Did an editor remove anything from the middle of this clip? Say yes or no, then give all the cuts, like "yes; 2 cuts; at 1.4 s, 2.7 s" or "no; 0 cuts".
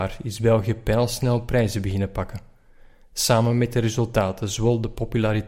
no; 0 cuts